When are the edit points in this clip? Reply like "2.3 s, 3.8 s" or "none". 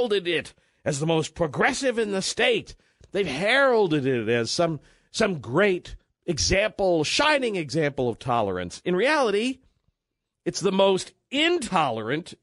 none

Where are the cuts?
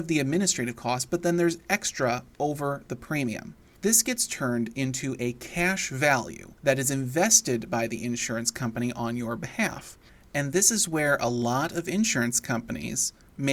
none

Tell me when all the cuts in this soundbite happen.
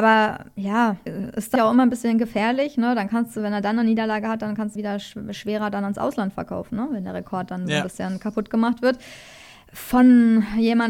1.1 s, 1.6 s, 4.8 s

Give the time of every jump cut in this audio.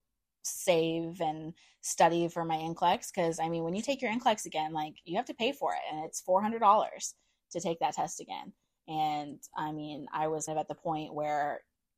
10.5 s

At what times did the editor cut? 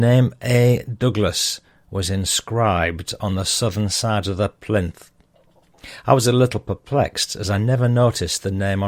none

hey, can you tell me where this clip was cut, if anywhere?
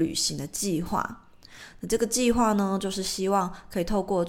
none

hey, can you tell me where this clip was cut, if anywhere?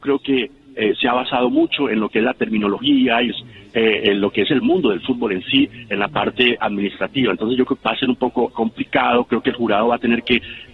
3.3 s, 7.8 s, 8.5 s

